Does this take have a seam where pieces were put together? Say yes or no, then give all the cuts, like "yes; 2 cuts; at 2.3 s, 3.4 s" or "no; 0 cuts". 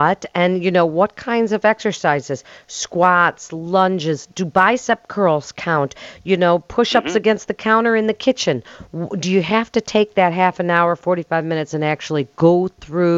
no; 0 cuts